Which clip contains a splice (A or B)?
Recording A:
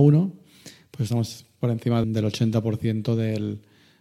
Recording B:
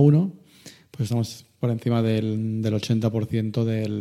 A